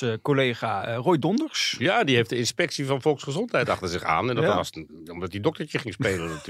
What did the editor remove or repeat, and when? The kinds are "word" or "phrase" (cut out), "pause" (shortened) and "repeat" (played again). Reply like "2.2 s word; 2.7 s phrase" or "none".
none